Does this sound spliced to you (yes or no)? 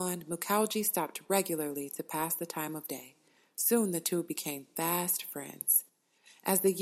no